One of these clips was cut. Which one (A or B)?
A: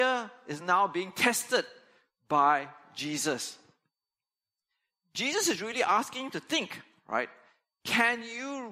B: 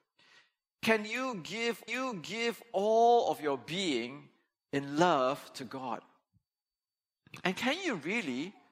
B